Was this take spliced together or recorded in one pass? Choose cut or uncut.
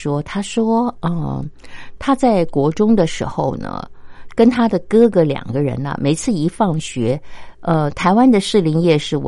uncut